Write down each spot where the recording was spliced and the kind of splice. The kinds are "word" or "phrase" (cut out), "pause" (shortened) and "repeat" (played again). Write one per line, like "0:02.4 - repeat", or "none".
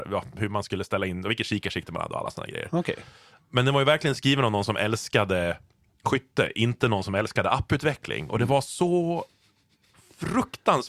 none